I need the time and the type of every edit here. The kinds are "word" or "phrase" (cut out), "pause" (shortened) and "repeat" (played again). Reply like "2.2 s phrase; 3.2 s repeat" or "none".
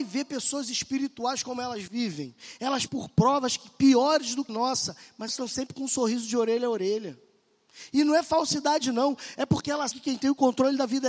2.9 s word; 4.5 s word; 5.3 s word; 9.9 s word

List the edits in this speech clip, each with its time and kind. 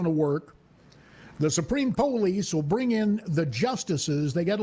1.9 s word

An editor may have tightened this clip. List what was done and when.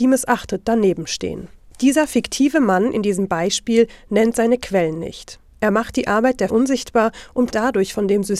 6.5 s word; 7.5 s word

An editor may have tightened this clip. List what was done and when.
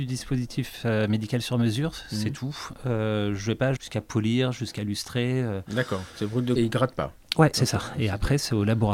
3.8 s word; 6.6 s word; 7.5 s word

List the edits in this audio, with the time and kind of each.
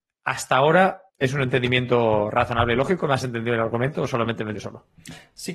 1.1 s pause; 4.5 s word

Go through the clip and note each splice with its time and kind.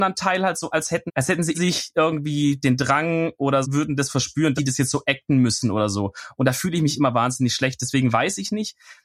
1.1 s word; 1.5 s word; 3.6 s word; 4.6 s word

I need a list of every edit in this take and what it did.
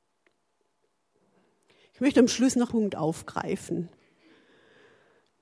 2.7 s word

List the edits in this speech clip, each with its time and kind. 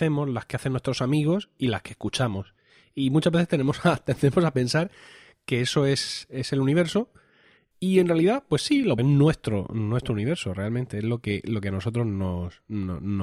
9.0 s phrase

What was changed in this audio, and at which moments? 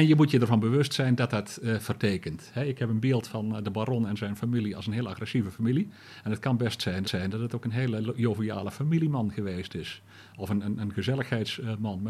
3.3 s word; 7.0 s repeat

